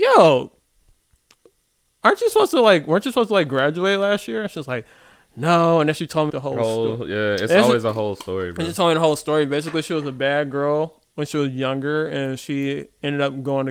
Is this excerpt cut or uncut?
cut